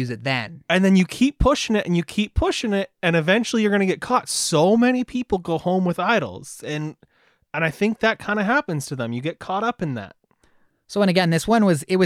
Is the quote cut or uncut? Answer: uncut